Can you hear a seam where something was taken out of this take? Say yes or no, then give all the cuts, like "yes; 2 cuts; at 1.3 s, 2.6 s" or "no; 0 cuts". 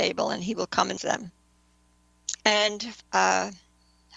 yes; 2 cuts; at 1.0 s, 2.4 s